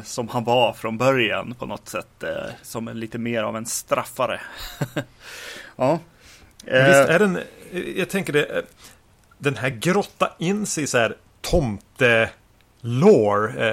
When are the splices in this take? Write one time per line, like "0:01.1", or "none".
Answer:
none